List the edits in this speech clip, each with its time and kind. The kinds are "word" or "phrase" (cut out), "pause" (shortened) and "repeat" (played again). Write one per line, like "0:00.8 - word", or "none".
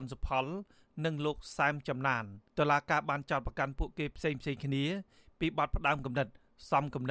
0:02.5 - pause